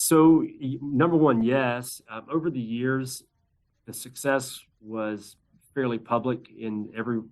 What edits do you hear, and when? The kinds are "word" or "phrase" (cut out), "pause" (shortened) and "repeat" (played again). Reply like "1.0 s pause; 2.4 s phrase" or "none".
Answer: none

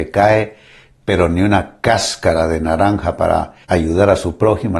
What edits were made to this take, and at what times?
3.6 s pause

